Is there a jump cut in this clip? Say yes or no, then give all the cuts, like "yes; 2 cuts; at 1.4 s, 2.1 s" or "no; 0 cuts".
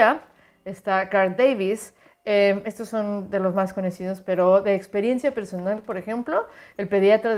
no; 0 cuts